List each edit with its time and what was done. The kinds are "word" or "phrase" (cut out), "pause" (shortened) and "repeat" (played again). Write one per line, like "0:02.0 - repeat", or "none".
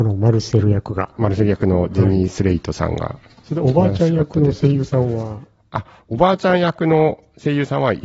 none